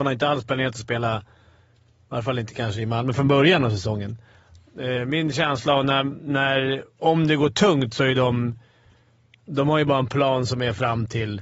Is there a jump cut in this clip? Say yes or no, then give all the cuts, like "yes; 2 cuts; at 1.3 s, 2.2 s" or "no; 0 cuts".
no; 0 cuts